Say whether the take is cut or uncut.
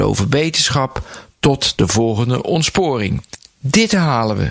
uncut